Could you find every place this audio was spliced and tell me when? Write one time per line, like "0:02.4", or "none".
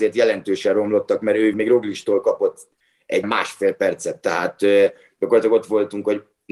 0:01.5
0:03.2